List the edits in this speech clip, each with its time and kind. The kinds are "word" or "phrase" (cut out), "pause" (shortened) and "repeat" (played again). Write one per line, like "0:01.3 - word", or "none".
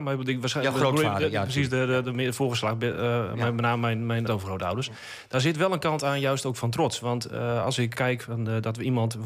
0:02.0 - word
0:04.3 - word
0:07.9 - word